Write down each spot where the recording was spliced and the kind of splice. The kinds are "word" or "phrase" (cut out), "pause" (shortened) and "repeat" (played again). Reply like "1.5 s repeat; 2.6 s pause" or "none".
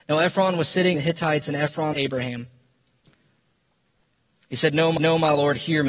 0.9 s word; 1.9 s phrase; 5.0 s repeat